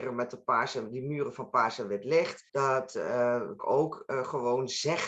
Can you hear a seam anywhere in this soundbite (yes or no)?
yes